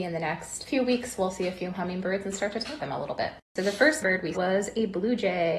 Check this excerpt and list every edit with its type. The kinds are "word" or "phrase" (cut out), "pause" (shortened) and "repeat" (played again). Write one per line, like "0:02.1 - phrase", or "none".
0:02.8 - word
0:03.4 - pause
0:04.0 - word
0:04.3 - word